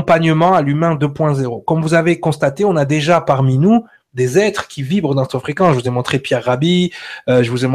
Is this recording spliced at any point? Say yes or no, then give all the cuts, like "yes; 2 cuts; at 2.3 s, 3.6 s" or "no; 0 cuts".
no; 0 cuts